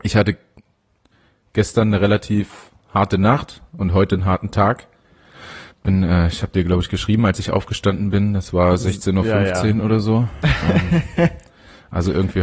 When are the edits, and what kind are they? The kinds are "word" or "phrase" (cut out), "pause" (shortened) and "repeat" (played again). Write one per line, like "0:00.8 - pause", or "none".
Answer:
0:05.7 - pause